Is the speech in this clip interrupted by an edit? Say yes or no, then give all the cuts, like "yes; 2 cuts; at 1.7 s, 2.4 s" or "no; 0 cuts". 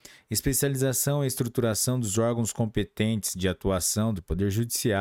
no; 0 cuts